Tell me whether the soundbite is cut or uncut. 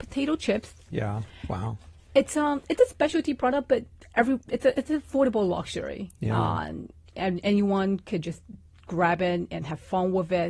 uncut